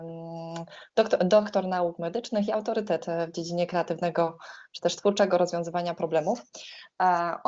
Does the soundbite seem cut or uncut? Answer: uncut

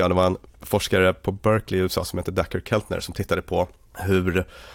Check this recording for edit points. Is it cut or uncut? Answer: uncut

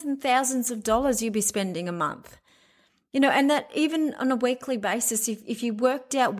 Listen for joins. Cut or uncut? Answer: uncut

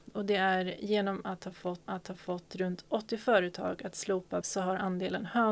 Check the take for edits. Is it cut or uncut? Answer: cut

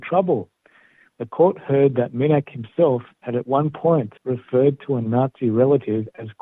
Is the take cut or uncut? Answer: cut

